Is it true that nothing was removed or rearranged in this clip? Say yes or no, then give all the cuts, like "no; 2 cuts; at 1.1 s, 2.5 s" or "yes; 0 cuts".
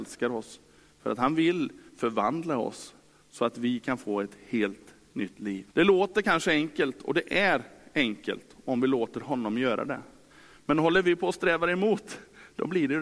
no; 1 cut; at 5.7 s